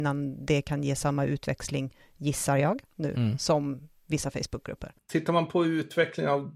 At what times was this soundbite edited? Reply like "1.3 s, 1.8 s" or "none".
none